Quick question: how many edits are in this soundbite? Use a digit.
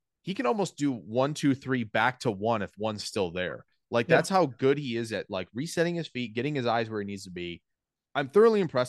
1